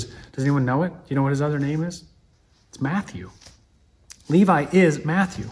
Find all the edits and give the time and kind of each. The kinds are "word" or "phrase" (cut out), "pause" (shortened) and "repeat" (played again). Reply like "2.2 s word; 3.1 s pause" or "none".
2.3 s pause